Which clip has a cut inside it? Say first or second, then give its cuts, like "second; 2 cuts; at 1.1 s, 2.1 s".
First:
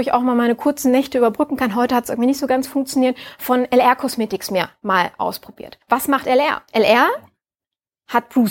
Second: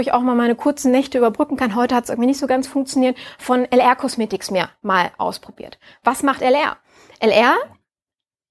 first; 2 cuts; at 5.8 s, 6.7 s